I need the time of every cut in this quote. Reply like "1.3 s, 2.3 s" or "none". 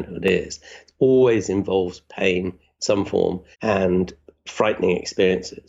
3.5 s